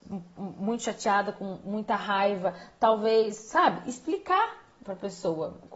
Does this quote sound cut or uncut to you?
uncut